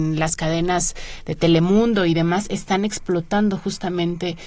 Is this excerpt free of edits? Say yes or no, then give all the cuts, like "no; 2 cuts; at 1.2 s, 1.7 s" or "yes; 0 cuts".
yes; 0 cuts